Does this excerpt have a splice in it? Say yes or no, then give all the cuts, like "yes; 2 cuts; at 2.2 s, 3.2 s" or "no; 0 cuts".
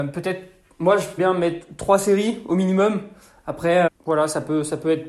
yes; 2 cuts; at 1.2 s, 3.9 s